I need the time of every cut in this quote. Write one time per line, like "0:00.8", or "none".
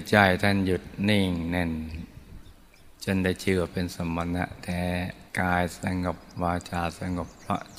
0:02.9
0:05.3